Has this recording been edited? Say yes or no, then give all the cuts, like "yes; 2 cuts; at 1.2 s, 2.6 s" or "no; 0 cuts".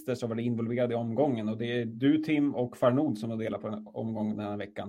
no; 0 cuts